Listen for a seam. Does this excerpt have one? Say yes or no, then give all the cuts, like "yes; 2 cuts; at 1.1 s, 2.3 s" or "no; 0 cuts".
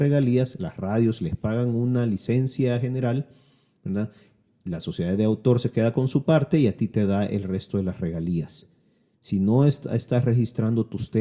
no; 0 cuts